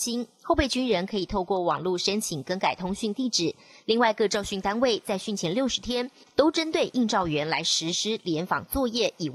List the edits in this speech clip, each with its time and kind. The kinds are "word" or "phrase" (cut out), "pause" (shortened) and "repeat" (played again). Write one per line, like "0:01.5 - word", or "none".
none